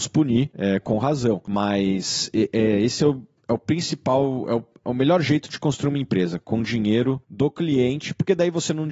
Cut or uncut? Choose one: uncut